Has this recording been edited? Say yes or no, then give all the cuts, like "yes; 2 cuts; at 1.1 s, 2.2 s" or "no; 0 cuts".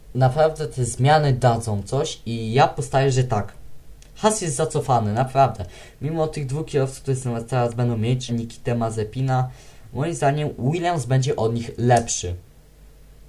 yes; 1 cut; at 8.3 s